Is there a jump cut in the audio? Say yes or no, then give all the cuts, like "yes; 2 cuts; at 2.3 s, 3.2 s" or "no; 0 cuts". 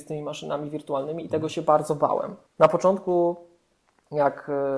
yes; 1 cut; at 2.5 s